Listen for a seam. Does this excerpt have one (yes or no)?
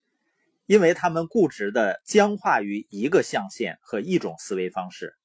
no